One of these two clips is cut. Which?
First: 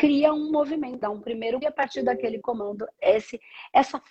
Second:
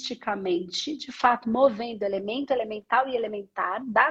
first; 4 cuts; at 1.0 s, 1.6 s, 2.4 s, 2.9 s

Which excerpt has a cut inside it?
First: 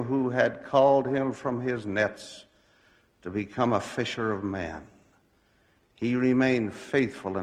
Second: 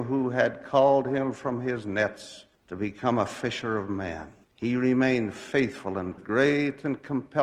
second; 3 cuts; at 2.5 s, 4.4 s, 6.2 s

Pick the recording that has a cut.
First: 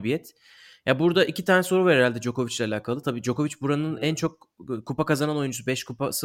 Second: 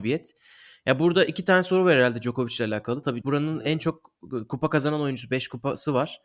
second; 1 cut; at 3.2 s

